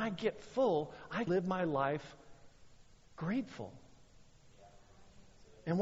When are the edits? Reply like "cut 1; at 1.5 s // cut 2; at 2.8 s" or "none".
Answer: cut 1; at 1.3 s